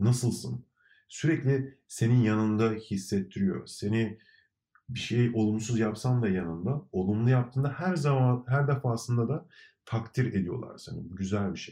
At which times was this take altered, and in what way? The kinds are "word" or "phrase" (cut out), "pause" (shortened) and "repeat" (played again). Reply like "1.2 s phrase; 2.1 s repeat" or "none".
none